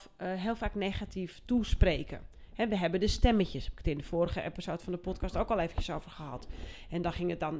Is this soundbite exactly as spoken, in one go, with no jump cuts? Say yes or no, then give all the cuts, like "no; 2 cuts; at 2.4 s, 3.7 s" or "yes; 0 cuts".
yes; 0 cuts